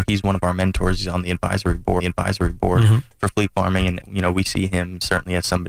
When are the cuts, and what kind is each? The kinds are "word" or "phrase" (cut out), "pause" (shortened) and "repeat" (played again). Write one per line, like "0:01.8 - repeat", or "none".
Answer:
0:02.0 - repeat
0:04.0 - word